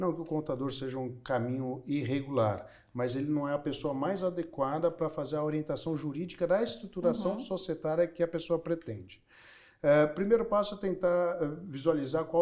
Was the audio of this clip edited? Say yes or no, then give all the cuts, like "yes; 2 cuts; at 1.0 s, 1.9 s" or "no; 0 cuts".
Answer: no; 0 cuts